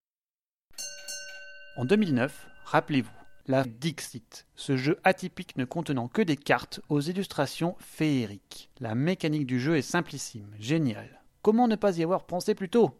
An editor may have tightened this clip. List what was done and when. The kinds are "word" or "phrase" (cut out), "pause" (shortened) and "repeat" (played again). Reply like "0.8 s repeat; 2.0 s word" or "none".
3.6 s phrase